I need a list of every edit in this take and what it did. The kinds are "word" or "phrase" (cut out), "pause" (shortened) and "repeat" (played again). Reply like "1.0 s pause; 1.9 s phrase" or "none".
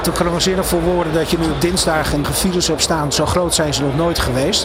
2.2 s word